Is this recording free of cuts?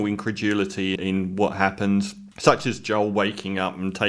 no; 2 cuts; at 1.0 s, 2.3 s

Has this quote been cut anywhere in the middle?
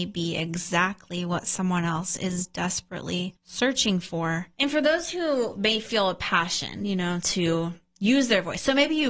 yes; 2 cuts; at 3.4 s, 4.5 s

